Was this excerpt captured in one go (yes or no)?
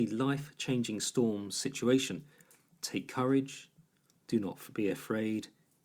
yes